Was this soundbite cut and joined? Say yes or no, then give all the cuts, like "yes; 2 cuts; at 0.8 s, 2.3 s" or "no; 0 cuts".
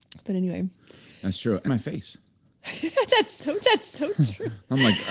yes; 2 cuts; at 1.7 s, 3.6 s